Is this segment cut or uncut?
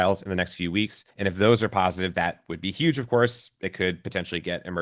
cut